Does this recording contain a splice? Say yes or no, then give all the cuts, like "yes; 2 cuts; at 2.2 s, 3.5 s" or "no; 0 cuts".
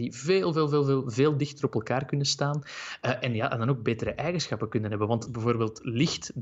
no; 0 cuts